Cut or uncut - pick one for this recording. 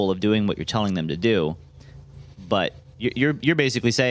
uncut